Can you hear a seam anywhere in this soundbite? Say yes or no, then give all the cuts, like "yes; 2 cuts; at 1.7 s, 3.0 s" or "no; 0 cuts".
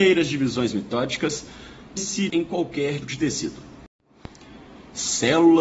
yes; 3 cuts; at 2.0 s, 2.3 s, 3.0 s